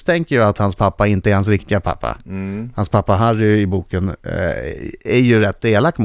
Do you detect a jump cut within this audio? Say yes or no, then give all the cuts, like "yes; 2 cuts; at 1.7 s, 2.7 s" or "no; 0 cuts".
no; 0 cuts